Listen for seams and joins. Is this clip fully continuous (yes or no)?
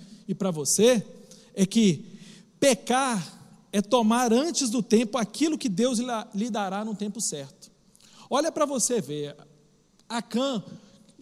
yes